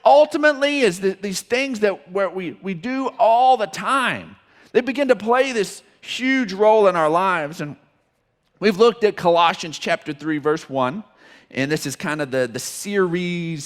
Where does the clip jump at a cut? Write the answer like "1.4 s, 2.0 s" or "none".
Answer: none